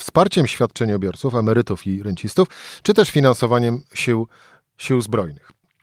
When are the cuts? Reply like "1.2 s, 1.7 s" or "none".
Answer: none